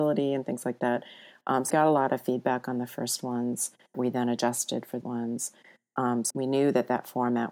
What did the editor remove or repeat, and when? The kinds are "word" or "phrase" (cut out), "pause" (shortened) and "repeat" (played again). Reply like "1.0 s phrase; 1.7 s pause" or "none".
1.7 s word; 3.9 s word; 5.0 s word; 6.3 s word